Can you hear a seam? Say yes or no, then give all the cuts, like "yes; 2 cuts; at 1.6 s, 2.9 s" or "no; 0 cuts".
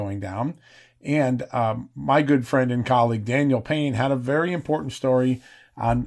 no; 0 cuts